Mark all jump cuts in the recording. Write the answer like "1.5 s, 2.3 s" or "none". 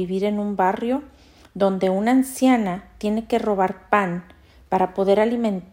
none